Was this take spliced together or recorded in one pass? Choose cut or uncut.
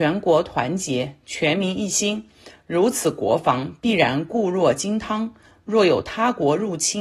uncut